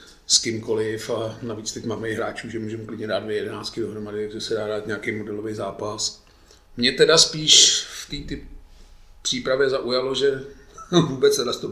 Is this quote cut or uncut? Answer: uncut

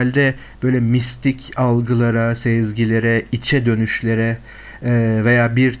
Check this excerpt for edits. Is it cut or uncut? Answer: uncut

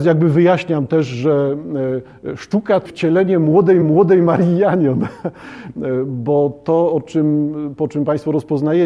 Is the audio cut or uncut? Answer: cut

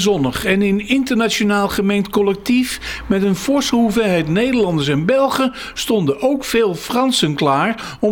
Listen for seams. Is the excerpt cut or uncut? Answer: uncut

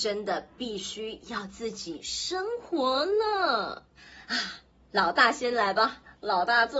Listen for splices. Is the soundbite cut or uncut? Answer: cut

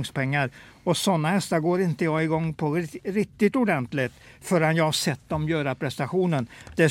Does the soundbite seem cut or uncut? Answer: uncut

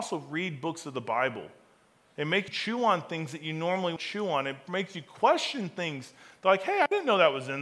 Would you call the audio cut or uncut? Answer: cut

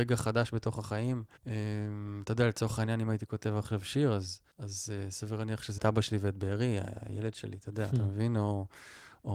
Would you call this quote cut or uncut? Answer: cut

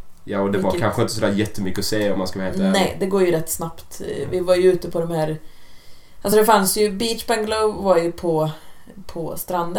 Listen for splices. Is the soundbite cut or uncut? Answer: uncut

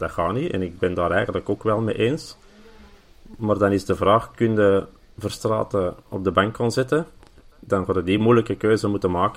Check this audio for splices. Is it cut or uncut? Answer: uncut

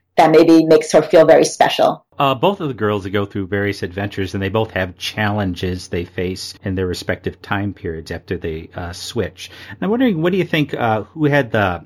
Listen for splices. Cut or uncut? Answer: cut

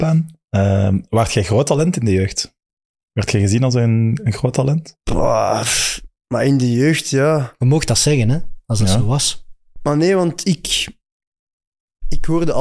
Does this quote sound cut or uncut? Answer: cut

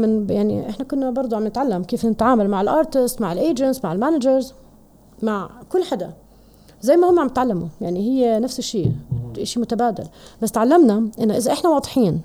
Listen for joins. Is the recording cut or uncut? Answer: uncut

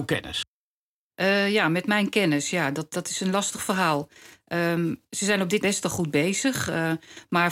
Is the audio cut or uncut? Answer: cut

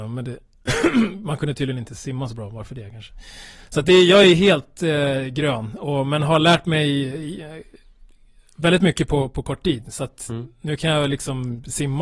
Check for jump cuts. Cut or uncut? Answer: uncut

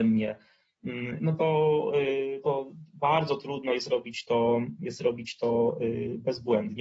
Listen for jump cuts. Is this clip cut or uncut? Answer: cut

